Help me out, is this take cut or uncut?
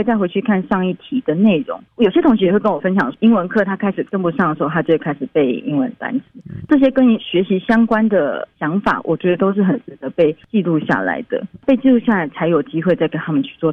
cut